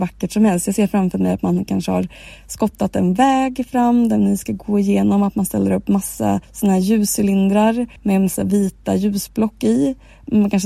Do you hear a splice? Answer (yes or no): yes